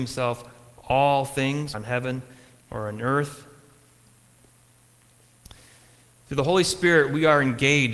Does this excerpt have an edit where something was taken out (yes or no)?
yes